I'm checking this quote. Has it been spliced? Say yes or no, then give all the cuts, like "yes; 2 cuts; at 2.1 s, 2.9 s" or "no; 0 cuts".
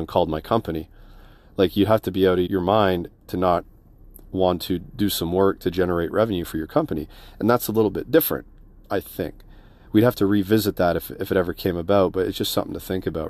yes; 1 cut; at 2.5 s